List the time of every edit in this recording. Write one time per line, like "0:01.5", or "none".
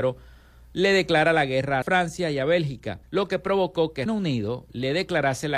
0:01.8
0:03.0
0:04.1